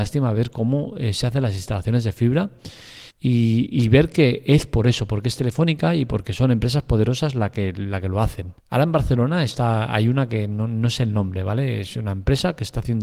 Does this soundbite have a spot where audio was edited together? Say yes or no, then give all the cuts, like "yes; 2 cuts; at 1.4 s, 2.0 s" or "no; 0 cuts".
yes; 2 cuts; at 3.1 s, 8.6 s